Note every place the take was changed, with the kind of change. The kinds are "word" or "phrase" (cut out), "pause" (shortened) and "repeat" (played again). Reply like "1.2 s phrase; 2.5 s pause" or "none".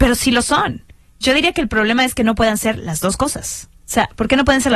3.8 s pause